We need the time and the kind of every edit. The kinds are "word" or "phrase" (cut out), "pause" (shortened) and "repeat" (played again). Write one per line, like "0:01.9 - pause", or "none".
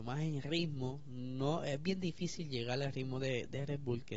none